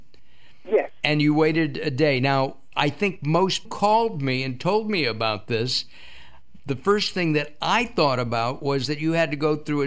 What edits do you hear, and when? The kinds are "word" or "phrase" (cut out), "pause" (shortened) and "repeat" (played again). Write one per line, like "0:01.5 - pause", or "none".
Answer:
0:03.6 - phrase